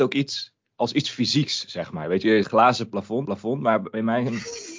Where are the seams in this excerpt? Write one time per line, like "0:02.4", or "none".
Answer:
0:02.4
0:03.2